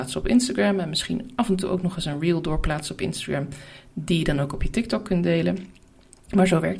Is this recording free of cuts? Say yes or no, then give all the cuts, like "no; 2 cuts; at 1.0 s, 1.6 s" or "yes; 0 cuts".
yes; 0 cuts